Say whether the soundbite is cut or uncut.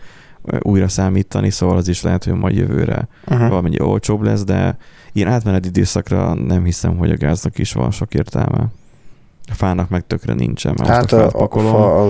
uncut